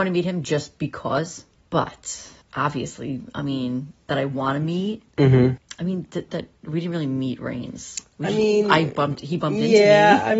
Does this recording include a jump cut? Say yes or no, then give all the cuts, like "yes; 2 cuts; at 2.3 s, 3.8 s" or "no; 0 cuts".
yes; 1 cut; at 6.3 s